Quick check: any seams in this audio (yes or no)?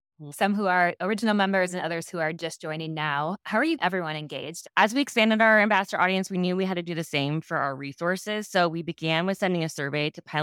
yes